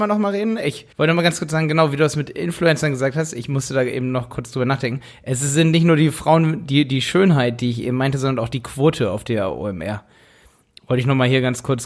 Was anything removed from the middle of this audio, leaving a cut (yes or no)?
yes